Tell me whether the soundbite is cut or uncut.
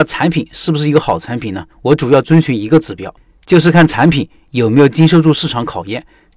cut